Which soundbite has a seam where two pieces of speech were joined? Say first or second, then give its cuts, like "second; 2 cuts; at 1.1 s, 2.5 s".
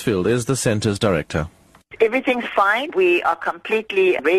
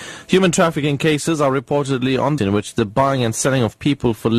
second; 1 cut; at 2.4 s